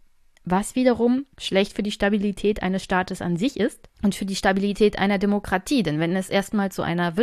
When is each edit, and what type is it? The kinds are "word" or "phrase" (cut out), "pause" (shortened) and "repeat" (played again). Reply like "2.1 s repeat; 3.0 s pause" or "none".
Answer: 1.3 s pause; 3.9 s pause